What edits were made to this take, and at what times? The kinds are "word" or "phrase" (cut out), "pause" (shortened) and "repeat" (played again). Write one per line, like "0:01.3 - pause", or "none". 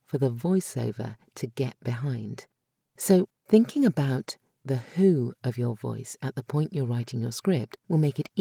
none